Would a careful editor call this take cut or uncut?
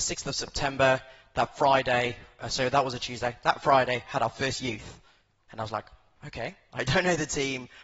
uncut